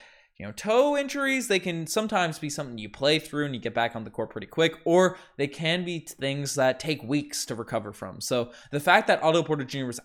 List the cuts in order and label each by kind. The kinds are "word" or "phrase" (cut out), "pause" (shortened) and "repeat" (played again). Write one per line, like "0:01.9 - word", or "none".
none